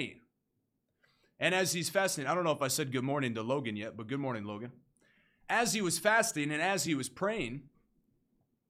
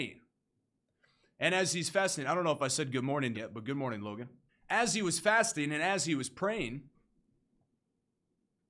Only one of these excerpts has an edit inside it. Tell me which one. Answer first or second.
second